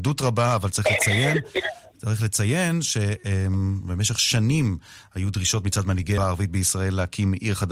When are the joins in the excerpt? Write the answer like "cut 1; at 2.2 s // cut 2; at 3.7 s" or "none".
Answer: cut 1; at 6.2 s